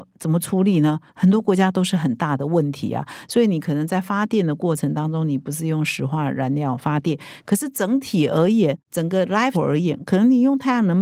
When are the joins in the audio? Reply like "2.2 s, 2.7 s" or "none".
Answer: 9.5 s